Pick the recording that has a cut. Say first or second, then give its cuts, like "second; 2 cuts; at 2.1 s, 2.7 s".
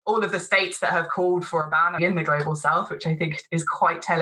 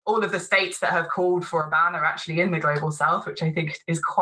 first; 1 cut; at 2.0 s